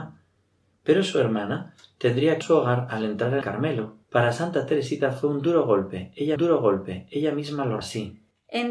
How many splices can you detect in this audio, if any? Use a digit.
5